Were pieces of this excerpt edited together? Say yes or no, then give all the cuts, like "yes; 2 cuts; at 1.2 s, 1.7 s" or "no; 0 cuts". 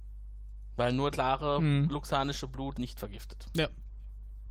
yes; 2 cuts; at 1.1 s, 2.7 s